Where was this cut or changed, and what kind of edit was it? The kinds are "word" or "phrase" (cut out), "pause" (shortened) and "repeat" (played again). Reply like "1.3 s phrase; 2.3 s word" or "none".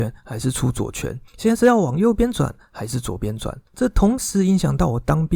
1.3 s pause; 3.7 s pause